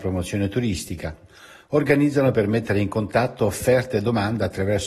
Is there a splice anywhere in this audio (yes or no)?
no